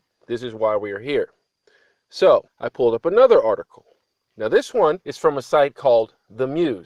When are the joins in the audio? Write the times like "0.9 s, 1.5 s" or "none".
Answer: 2.5 s, 5.0 s